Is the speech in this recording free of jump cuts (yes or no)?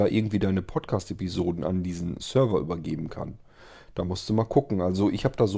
yes